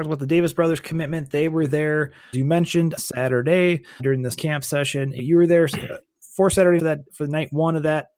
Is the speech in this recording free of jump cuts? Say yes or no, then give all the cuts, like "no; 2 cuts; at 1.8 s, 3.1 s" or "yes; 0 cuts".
no; 7 cuts; at 2.3 s, 3.0 s, 4.0 s, 4.4 s, 5.2 s, 6.8 s, 7.1 s